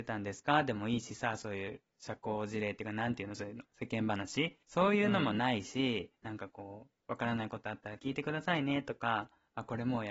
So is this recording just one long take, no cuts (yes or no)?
no